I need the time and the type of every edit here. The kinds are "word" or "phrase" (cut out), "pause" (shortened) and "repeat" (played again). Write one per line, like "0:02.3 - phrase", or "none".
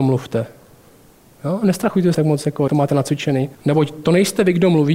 0:02.1 - word
0:02.7 - word
0:03.5 - pause